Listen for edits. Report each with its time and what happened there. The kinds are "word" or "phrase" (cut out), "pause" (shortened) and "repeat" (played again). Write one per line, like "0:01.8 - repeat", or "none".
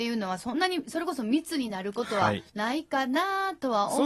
0:02.5 - pause